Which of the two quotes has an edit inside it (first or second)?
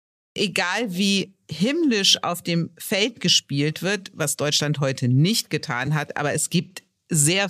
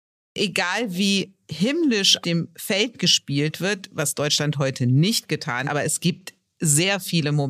second